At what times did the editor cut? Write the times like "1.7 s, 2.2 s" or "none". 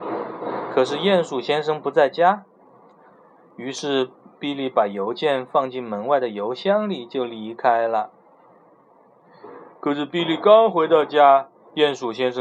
none